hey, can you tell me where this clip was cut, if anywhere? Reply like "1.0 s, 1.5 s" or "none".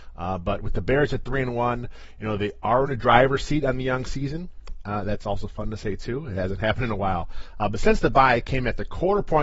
none

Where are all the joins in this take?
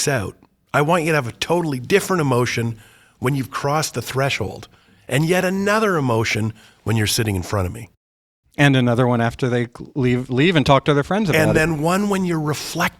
none

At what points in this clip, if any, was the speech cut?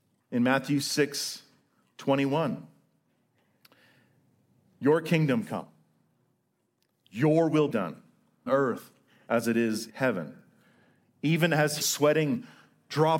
7.7 s, 8.5 s, 9.9 s, 11.8 s

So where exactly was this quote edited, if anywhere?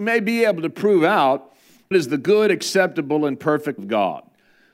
1.9 s, 3.8 s

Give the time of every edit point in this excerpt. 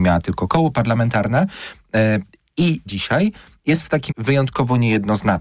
2.9 s, 4.1 s

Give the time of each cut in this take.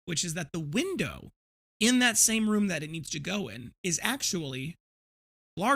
none

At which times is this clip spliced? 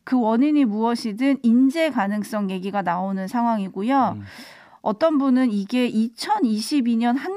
none

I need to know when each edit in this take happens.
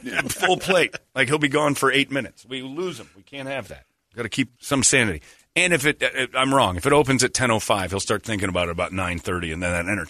4.5 s

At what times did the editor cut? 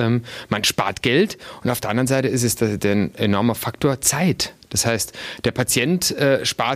none

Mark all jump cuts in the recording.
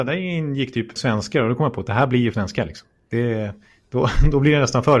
1.0 s, 2.3 s

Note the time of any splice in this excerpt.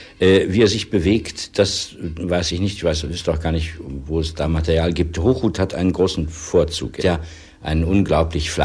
7.0 s

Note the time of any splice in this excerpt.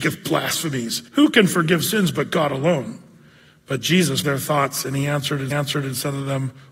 1.1 s, 4.2 s, 5.5 s

